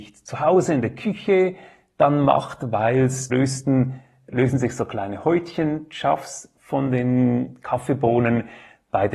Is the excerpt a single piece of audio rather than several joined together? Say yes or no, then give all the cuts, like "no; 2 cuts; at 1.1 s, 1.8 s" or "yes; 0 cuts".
no; 1 cut; at 3.3 s